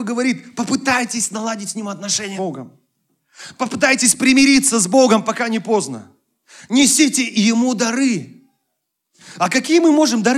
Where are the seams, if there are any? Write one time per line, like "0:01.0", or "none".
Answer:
0:02.4